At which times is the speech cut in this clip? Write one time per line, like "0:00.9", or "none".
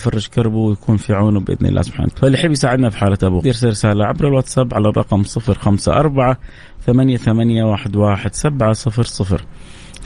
0:02.1
0:03.4